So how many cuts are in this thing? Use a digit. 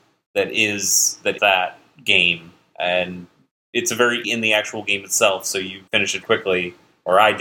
4